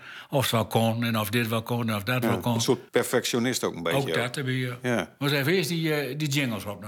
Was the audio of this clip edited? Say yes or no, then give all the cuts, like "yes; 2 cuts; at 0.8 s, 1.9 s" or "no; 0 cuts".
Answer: yes; 1 cut; at 2.9 s